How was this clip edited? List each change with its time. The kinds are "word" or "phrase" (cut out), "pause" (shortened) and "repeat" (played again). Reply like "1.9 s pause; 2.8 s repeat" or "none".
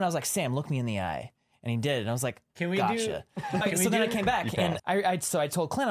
3.6 s word; 4.8 s word